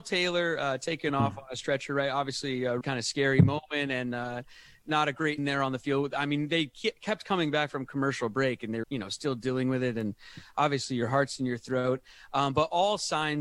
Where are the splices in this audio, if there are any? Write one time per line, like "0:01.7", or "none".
0:02.8
0:05.4
0:08.8